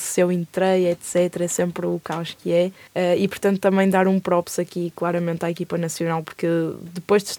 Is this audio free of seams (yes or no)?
no